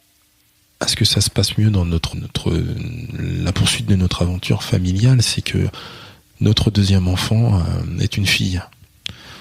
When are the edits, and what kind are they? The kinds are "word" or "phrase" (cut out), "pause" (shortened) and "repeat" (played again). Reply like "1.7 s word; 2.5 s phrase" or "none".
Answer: 2.1 s word